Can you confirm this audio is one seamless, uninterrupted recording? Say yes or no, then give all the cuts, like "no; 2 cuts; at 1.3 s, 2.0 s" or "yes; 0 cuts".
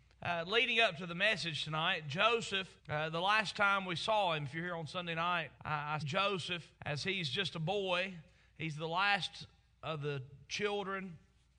no; 4 cuts; at 2.8 s, 5.6 s, 6.0 s, 6.7 s